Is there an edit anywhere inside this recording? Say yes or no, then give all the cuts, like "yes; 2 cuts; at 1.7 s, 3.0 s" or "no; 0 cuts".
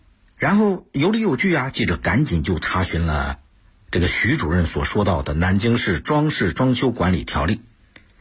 no; 0 cuts